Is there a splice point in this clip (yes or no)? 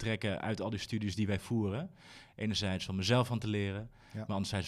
no